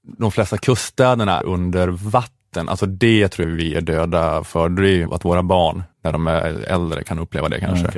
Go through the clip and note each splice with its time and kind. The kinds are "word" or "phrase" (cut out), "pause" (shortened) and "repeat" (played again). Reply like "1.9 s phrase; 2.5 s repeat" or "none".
1.4 s word; 3.4 s word; 5.1 s word; 5.9 s pause